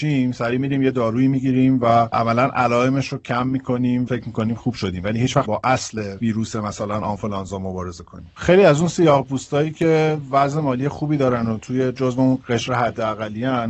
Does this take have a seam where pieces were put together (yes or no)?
yes